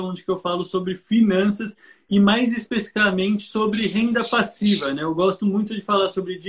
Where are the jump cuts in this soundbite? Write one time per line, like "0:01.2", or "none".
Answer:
none